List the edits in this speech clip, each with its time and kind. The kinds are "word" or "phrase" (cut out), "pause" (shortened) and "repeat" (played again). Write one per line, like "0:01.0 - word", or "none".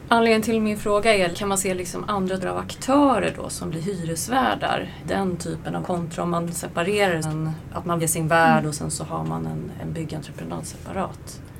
0:01.3 - word
0:02.4 - word
0:05.0 - word
0:05.8 - word
0:07.2 - word
0:08.0 - word
0:09.8 - word